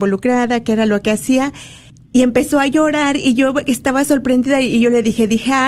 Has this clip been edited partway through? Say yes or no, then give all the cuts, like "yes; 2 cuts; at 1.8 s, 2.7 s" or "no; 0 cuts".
yes; 1 cut; at 1.9 s